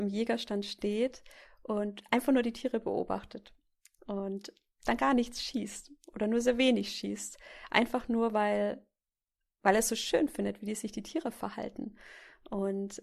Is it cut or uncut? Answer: uncut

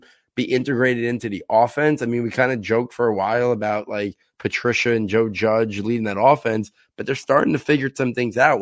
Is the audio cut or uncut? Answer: uncut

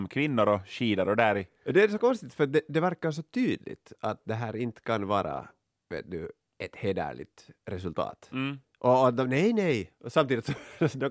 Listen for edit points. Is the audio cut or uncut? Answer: uncut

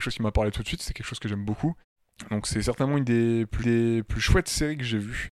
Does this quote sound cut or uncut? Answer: cut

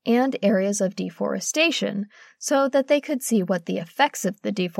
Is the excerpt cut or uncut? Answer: uncut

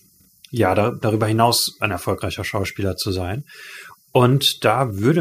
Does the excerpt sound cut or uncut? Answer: uncut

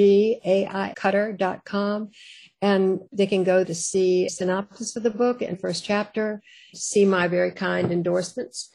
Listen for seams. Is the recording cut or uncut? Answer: cut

